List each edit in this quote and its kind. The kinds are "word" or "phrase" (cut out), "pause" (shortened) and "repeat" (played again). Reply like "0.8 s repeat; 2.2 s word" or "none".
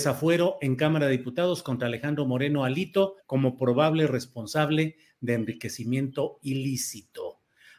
3.2 s pause